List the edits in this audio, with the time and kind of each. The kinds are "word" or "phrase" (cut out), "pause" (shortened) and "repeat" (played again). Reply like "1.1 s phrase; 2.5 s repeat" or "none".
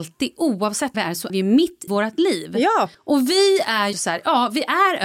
0.9 s phrase; 1.3 s word; 1.9 s word; 2.9 s pause; 3.9 s word